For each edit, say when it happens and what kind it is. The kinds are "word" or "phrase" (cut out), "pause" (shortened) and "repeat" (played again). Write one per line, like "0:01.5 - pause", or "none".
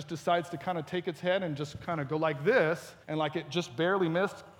0:03.0 - pause